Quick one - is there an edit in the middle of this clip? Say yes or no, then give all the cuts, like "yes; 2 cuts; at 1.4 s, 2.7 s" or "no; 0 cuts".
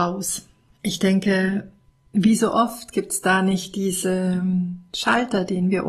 yes; 1 cut; at 1.9 s